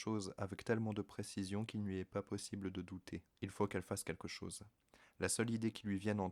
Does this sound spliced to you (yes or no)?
yes